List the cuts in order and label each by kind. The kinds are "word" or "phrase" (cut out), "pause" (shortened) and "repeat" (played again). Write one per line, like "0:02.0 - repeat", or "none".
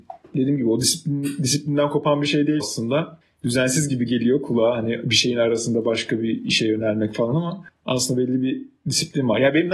0:02.6 - word

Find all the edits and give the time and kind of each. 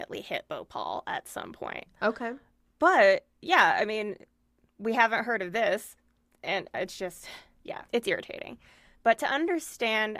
0:07.9 - pause

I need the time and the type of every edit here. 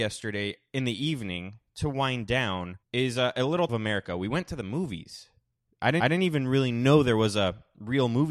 0:02.8 - pause
0:03.7 - phrase
0:06.0 - repeat

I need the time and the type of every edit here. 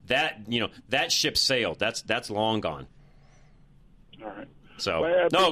none

